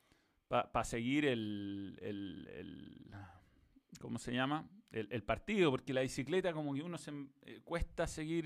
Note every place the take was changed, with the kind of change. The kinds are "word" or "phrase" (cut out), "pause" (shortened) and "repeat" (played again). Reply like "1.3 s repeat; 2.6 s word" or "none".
none